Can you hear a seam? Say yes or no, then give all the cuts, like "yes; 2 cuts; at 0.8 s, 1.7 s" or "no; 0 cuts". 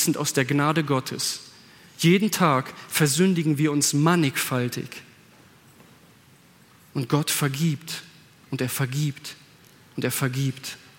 no; 0 cuts